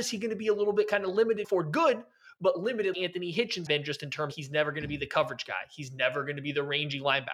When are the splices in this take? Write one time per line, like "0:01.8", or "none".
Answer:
0:01.4
0:02.9
0:03.7
0:04.3